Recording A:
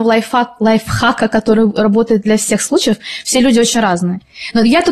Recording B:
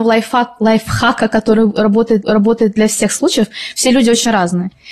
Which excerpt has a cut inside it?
B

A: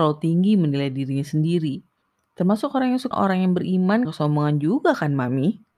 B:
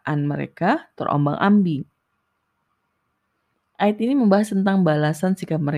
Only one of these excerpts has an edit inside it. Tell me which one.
A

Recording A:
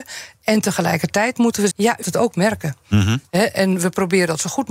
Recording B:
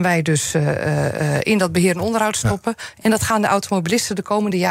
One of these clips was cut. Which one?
A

